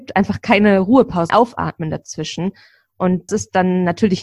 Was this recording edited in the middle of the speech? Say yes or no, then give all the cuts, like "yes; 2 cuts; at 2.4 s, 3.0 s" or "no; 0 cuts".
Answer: yes; 2 cuts; at 1.3 s, 3.3 s